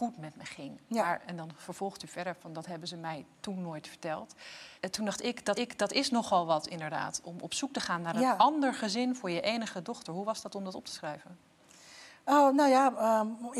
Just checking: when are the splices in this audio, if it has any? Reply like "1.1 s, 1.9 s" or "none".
4.8 s, 5.5 s